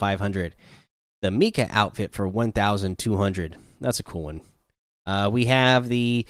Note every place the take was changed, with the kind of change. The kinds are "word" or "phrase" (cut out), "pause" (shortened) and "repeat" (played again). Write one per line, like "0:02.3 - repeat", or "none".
none